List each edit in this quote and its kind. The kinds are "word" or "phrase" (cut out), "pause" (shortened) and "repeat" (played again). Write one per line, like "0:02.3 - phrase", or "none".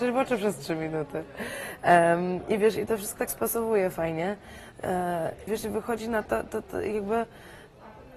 0:03.2 - word
0:05.5 - word
0:06.3 - phrase
0:06.6 - word